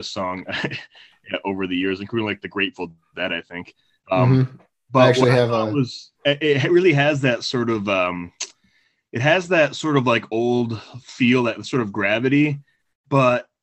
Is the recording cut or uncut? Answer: uncut